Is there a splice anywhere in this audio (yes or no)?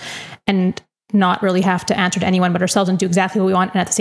no